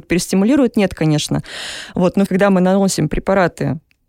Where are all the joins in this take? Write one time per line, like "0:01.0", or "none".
0:02.3